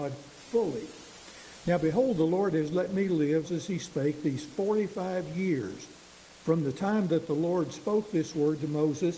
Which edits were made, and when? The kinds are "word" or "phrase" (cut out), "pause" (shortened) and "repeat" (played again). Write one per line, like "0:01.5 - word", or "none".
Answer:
0:03.4 - word